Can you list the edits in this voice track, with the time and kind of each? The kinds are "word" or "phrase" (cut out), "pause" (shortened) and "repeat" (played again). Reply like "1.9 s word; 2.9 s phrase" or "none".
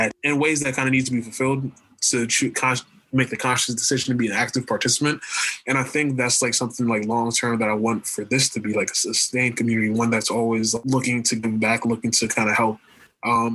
none